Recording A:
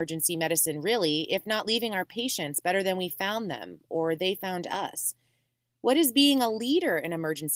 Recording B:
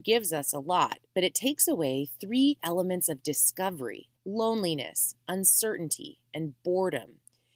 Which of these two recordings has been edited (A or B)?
B